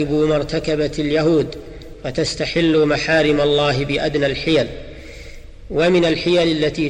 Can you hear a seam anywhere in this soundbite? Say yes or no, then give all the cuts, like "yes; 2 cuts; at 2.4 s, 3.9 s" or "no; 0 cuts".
no; 0 cuts